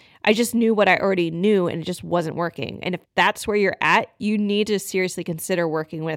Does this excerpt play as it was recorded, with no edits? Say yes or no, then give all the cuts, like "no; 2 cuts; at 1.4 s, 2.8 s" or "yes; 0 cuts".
no; 1 cut; at 3.0 s